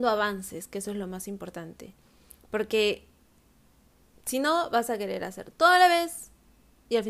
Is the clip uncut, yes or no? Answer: yes